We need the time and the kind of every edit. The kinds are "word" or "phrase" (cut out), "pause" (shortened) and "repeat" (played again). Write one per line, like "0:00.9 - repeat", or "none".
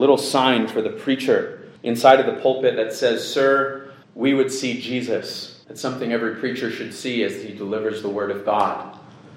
0:01.8 - pause
0:04.0 - pause
0:05.6 - pause